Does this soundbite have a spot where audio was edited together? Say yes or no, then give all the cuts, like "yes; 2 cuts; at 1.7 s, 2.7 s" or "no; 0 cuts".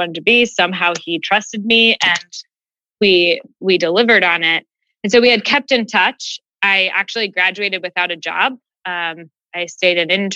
no; 0 cuts